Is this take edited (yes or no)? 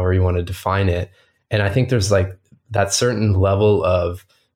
no